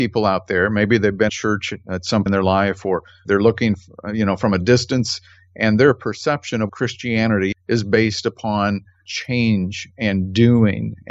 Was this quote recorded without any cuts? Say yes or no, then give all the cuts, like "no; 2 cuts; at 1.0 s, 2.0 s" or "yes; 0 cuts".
no; 4 cuts; at 1.3 s, 2.3 s, 6.7 s, 7.5 s